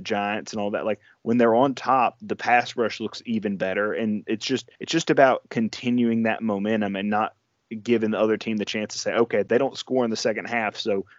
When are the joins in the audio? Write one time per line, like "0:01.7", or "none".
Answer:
0:04.7